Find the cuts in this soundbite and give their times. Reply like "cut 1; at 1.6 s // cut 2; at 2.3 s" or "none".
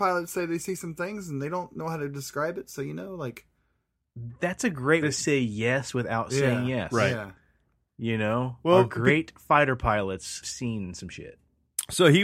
cut 1; at 5.0 s // cut 2; at 10.4 s